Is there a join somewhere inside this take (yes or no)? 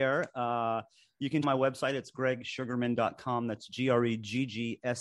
yes